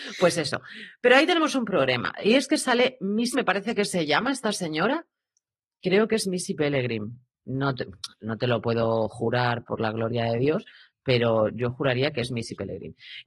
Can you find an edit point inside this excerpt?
yes; 2 cuts; at 3.3 s, 7.3 s

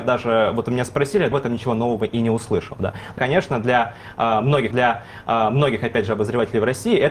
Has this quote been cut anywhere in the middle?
yes; 3 cuts; at 1.3 s, 3.2 s, 4.7 s

